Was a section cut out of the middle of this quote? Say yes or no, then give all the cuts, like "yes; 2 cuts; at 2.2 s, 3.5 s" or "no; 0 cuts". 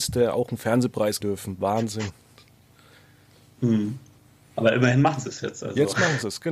yes; 2 cuts; at 1.2 s, 4.2 s